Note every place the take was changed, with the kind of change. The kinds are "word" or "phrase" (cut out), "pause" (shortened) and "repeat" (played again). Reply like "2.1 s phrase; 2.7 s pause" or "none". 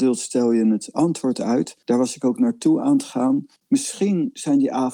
1.8 s pause; 3.6 s pause

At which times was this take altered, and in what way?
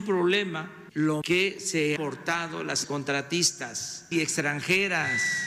0.9 s word; 1.2 s word; 2.0 s word; 2.8 s word; 4.1 s word

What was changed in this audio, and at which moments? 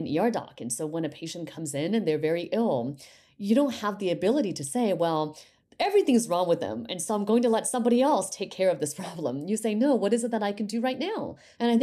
none

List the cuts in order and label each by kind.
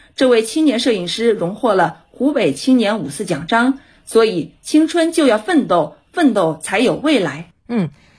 none

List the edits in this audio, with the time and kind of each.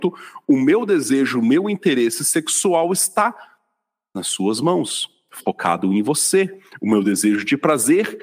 none

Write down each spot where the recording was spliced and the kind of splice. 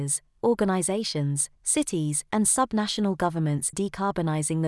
3.7 s word

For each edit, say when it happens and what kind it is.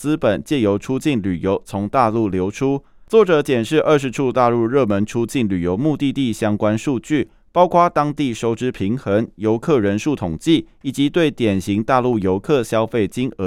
none

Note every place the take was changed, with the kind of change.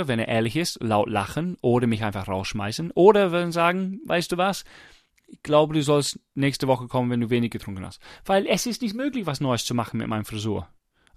none

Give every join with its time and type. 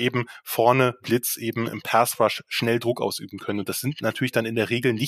1.0 s word

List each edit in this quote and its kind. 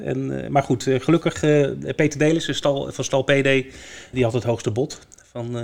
4.1 s word

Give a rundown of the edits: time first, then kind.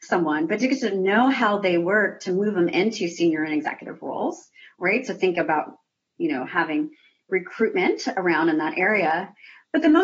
none

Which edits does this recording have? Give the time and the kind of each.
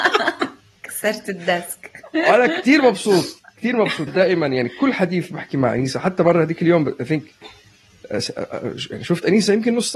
4.1 s word

